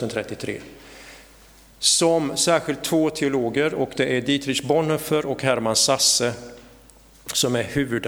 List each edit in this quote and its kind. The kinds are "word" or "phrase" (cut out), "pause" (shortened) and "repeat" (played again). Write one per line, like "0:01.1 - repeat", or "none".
none